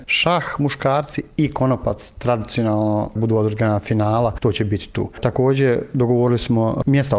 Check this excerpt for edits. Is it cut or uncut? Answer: cut